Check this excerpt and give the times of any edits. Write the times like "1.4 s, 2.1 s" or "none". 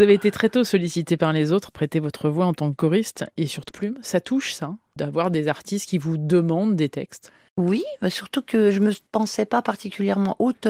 3.7 s